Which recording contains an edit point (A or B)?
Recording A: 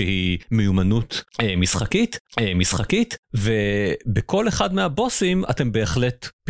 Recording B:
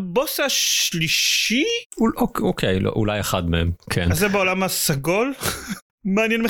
A